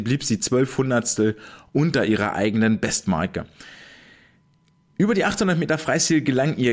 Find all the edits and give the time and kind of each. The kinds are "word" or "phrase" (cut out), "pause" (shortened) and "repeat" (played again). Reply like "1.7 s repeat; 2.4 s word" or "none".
none